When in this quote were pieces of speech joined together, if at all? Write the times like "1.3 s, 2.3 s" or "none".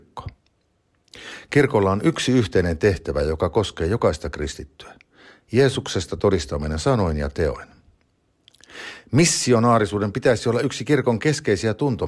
none